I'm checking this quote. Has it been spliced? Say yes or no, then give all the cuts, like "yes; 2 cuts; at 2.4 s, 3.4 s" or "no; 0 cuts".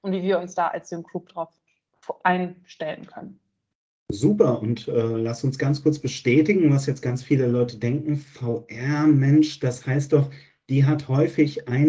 no; 0 cuts